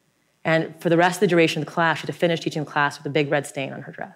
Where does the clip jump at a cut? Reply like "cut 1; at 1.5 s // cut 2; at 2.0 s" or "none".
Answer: none

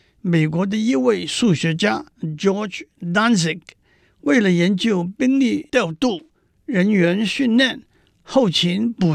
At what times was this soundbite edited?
cut 1; at 2.1 s

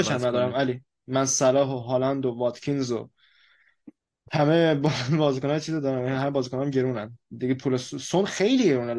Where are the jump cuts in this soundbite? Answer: none

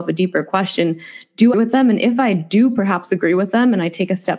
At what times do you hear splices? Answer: cut 1; at 1.5 s

